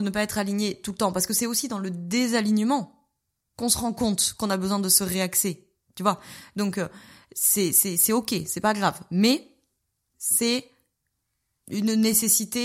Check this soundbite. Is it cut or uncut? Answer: uncut